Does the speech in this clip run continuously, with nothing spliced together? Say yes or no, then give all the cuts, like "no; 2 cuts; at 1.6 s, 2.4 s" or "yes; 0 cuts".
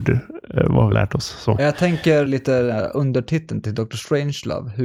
no; 2 cuts; at 0.9 s, 2.3 s